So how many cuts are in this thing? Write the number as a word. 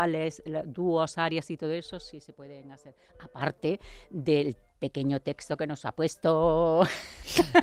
zero